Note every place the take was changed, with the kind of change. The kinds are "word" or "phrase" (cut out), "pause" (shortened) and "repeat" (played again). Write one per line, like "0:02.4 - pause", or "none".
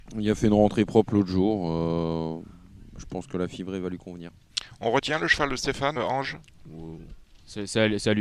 0:06.0 - word

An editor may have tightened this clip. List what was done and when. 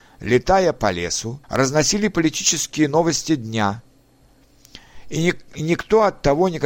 0:01.4 - pause

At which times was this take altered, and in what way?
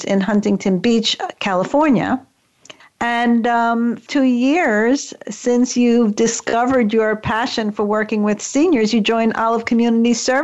0:02.8 - pause
0:04.1 - phrase

